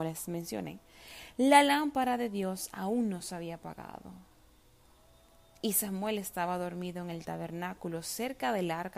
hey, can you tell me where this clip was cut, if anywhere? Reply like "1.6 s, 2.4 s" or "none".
none